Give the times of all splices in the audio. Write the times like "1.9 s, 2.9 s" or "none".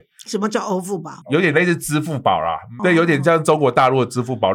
1.2 s, 2.8 s

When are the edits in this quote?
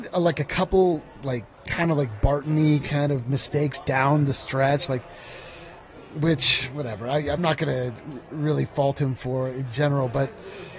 1.5 s, 7.4 s

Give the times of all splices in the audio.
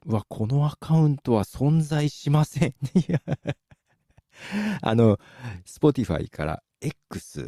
none

